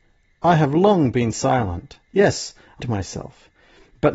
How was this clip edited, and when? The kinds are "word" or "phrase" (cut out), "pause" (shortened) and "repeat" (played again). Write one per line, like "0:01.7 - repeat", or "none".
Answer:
0:02.8 - phrase